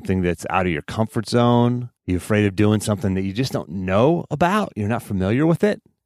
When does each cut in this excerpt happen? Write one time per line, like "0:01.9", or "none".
0:02.0